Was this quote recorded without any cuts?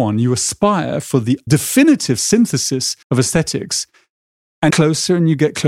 no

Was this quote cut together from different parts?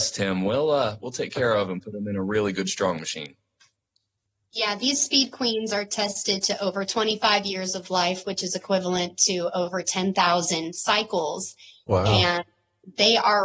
no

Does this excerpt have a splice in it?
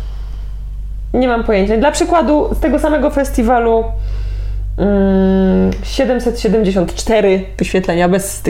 no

